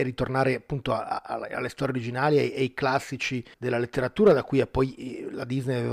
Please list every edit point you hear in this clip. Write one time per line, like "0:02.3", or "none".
0:03.5